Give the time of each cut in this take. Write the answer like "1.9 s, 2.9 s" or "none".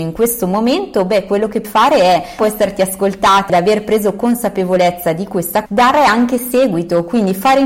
1.6 s, 2.4 s, 3.5 s, 5.7 s